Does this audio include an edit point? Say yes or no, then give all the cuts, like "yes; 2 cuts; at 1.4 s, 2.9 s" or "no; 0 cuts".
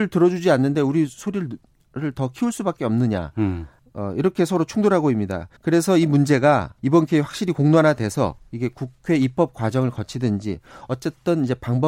yes; 3 cuts; at 3.8 s, 5.6 s, 6.8 s